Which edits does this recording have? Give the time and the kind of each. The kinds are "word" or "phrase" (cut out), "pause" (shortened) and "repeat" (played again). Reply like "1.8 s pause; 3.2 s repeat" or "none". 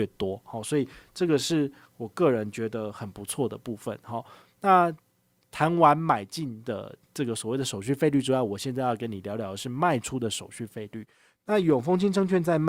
7.0 s pause